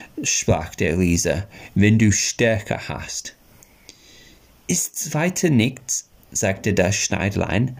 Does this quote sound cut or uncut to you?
uncut